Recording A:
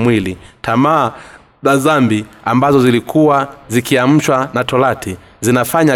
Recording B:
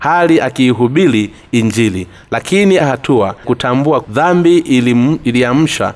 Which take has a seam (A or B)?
B